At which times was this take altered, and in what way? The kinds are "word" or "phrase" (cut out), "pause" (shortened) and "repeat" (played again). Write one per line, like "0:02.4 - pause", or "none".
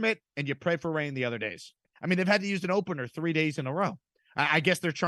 0:01.8 - pause

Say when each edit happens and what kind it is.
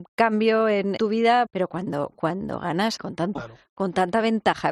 0:01.0 - word
0:01.4 - word
0:03.0 - word
0:03.3 - word

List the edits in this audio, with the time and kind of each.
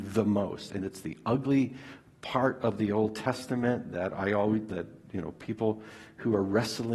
none

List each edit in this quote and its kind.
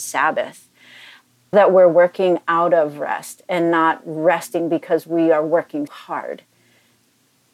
0:01.5 - word
0:05.9 - word

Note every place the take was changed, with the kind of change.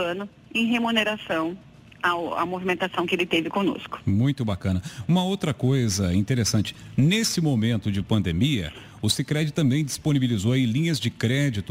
none

